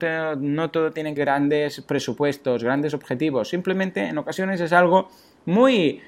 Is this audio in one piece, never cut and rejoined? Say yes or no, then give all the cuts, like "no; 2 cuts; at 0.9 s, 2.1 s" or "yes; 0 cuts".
no; 1 cut; at 1.2 s